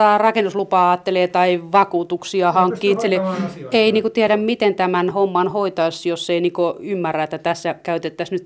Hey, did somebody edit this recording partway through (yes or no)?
no